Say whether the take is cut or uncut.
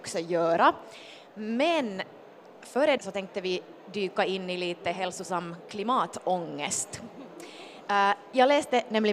cut